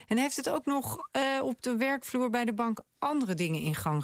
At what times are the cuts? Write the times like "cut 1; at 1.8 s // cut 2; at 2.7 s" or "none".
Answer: none